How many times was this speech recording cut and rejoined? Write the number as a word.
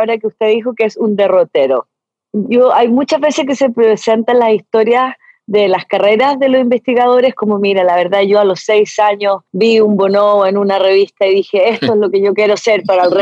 zero